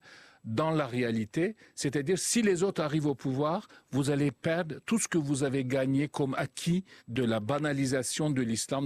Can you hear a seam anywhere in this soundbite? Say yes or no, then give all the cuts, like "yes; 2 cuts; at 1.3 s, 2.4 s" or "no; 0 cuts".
yes; 1 cut; at 7.0 s